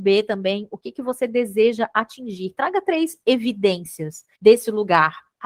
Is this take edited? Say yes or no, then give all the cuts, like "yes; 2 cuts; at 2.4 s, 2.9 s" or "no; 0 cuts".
yes; 1 cut; at 4.3 s